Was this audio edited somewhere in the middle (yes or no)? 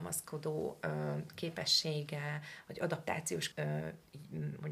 yes